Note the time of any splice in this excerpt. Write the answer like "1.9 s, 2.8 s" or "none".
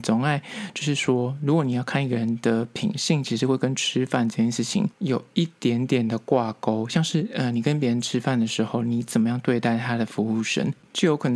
4.9 s